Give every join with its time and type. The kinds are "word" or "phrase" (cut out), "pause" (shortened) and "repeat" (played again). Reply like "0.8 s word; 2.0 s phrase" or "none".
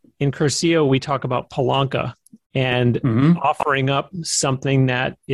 none